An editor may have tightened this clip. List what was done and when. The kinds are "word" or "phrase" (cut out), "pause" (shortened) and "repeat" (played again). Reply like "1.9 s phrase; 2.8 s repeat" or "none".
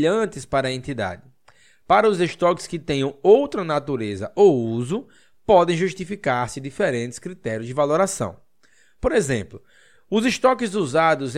none